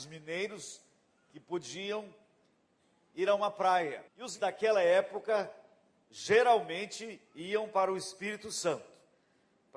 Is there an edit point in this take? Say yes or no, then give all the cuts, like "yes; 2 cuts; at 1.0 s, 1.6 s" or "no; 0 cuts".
yes; 2 cuts; at 4.1 s, 4.4 s